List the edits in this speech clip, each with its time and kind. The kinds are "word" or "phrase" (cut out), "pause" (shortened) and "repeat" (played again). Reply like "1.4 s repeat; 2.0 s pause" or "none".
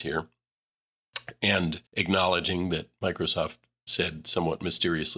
1.9 s pause